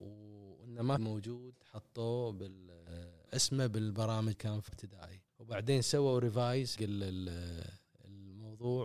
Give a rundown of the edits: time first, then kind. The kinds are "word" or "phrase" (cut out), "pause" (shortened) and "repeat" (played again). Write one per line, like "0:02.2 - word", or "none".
0:01.0 - phrase
0:03.3 - word
0:04.3 - word
0:04.7 - word
0:05.3 - pause
0:06.8 - word